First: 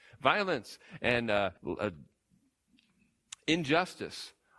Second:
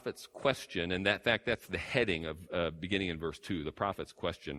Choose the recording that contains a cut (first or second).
first